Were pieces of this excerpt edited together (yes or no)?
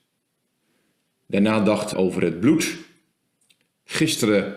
yes